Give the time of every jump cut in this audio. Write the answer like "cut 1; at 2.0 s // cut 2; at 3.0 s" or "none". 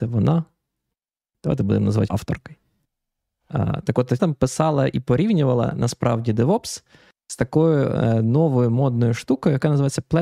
cut 1; at 2.1 s // cut 2; at 4.2 s